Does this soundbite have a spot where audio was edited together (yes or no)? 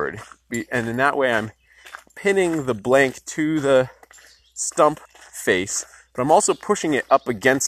yes